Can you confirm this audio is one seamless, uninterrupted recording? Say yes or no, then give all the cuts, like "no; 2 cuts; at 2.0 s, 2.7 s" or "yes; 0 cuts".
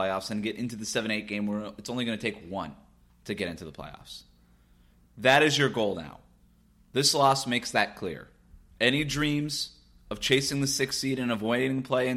yes; 0 cuts